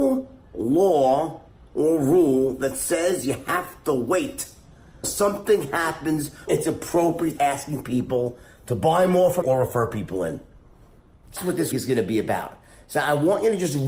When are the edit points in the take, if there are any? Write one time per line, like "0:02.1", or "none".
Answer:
0:05.0
0:06.5
0:07.4
0:09.4
0:11.4
0:11.7